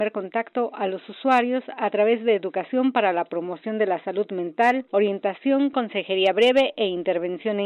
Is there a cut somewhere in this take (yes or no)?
no